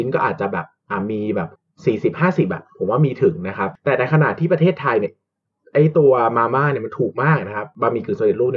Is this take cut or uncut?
cut